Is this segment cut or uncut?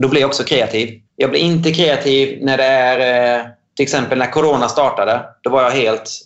cut